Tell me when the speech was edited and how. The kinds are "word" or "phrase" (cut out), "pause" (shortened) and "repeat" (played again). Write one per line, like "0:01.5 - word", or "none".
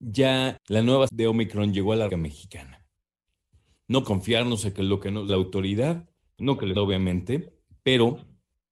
0:01.1 - word
0:02.1 - word
0:04.0 - word
0:05.3 - word
0:06.7 - word